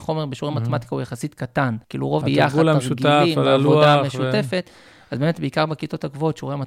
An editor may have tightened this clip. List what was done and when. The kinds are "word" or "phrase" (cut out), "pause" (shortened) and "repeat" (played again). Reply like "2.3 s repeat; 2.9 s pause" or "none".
1.8 s pause; 2.2 s phrase